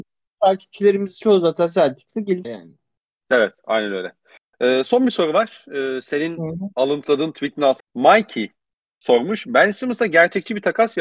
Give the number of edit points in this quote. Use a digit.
2